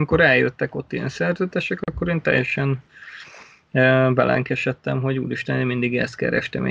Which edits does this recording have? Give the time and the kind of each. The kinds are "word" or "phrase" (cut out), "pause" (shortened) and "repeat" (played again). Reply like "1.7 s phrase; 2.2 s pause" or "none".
none